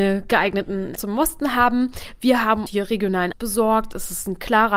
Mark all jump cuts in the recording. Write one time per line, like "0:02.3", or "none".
0:01.0
0:02.7
0:03.3

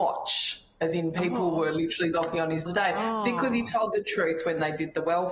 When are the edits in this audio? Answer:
0:02.7

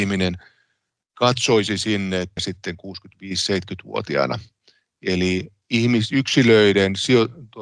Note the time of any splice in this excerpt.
0:02.4

